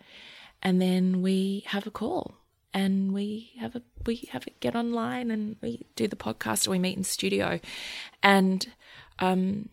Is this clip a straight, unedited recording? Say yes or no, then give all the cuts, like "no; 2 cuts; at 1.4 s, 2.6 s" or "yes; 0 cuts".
yes; 0 cuts